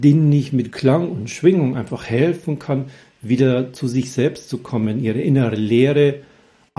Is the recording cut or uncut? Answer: uncut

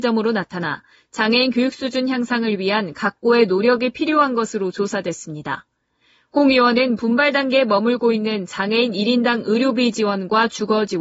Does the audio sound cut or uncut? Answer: uncut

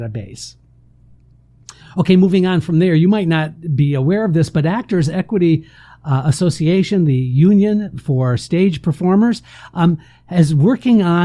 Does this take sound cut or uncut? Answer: uncut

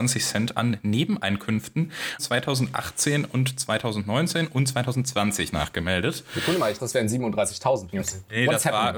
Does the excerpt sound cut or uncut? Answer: cut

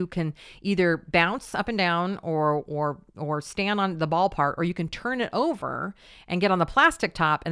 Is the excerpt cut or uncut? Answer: uncut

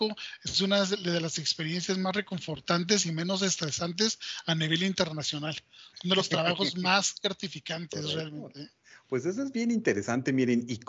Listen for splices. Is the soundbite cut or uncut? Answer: uncut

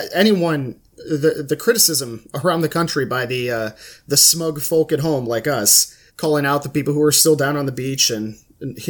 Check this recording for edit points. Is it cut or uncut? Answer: cut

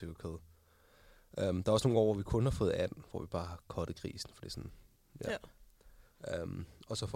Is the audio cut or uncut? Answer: uncut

